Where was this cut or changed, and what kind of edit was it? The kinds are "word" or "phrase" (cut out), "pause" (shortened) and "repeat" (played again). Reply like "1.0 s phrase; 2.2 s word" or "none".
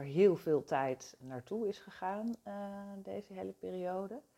1.2 s word